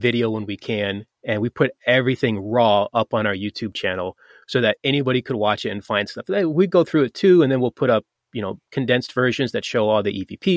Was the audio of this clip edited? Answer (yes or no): no